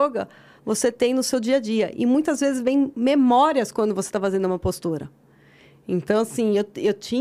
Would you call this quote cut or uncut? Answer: uncut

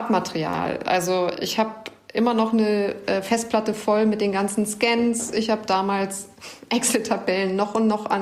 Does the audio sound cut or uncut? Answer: uncut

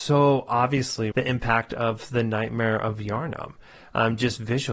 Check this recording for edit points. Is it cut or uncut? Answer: cut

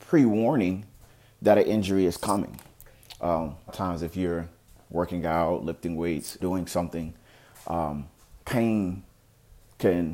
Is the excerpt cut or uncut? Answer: cut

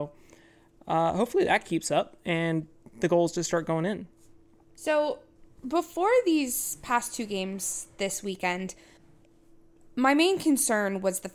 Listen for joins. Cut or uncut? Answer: uncut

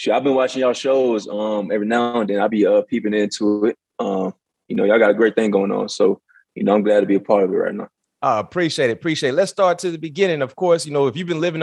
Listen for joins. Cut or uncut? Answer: uncut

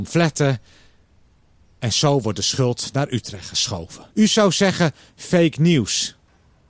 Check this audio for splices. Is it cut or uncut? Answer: cut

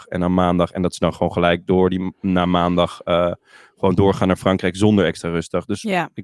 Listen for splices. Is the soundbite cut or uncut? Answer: uncut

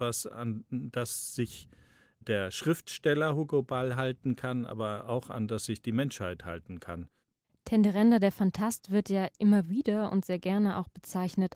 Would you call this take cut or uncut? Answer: uncut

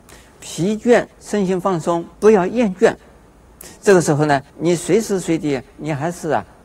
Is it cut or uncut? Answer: cut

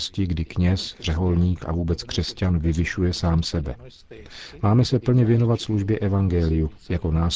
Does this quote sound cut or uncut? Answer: uncut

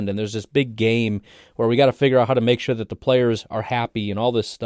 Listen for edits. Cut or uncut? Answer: uncut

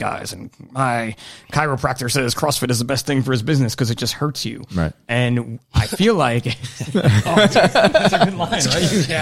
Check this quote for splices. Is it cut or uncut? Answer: uncut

